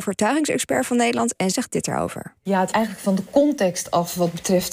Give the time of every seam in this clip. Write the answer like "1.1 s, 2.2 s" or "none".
1.5 s, 2.4 s, 2.7 s